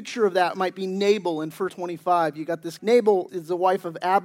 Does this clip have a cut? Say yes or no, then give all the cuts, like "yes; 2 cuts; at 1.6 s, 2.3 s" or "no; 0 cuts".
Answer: yes; 3 cuts; at 1.7 s, 2.8 s, 3.3 s